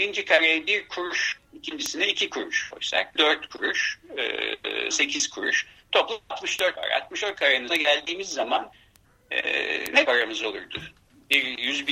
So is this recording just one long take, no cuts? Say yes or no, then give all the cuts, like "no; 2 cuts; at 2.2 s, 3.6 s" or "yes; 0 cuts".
no; 6 cuts; at 1.4 s, 3.2 s, 4.9 s, 6.8 s, 7.7 s, 10.1 s